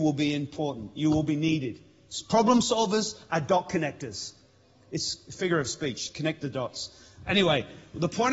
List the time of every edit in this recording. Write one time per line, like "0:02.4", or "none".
none